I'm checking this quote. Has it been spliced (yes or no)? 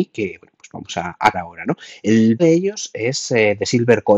yes